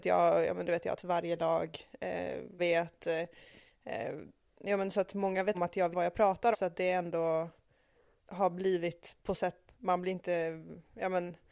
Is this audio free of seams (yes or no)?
no